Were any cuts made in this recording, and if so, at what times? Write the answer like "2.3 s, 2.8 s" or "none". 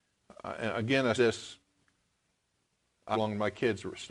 1.2 s, 3.1 s